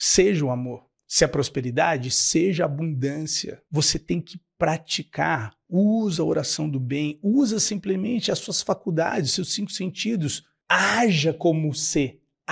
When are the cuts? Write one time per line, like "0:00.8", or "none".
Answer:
none